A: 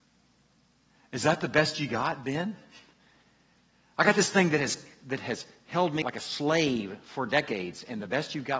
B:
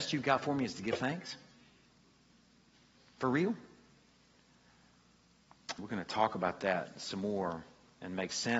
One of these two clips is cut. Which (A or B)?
A